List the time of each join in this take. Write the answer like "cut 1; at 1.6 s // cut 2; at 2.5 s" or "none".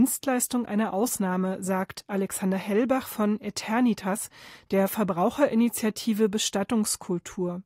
none